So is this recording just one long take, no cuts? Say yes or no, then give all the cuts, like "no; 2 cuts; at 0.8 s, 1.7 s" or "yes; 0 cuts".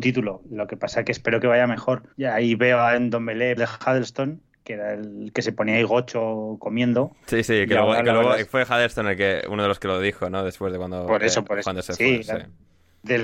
no; 2 cuts; at 2.1 s, 3.6 s